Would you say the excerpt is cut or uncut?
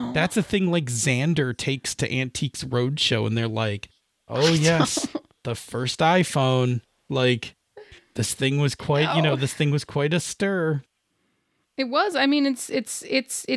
uncut